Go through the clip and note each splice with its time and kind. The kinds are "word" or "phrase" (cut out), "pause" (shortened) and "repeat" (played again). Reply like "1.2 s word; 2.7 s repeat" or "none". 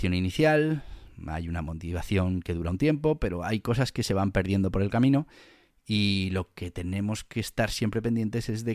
none